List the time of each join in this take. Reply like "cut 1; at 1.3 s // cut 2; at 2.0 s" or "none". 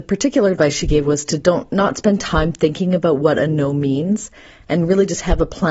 none